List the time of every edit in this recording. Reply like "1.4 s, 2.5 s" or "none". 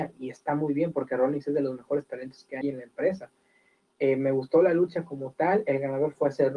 2.6 s